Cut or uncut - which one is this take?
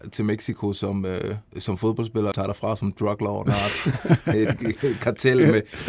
cut